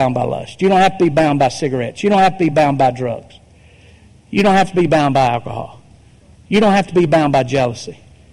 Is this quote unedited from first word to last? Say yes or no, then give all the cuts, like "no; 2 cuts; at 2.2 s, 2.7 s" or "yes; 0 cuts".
yes; 0 cuts